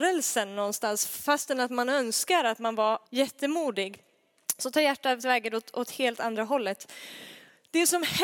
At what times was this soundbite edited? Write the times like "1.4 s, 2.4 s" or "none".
3.1 s